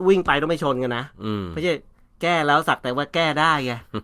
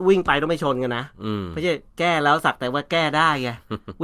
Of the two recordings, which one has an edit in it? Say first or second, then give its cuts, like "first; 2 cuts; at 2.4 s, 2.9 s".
second; 1 cut; at 1.9 s